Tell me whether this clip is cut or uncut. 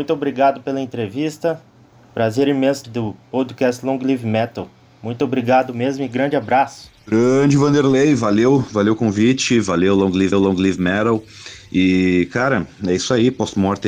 cut